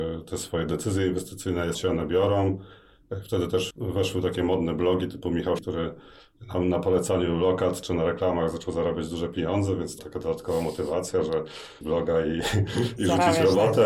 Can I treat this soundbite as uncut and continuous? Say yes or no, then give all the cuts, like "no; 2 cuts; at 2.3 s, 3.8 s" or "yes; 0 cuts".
no; 5 cuts; at 1.7 s, 3.7 s, 5.6 s, 10.0 s, 11.8 s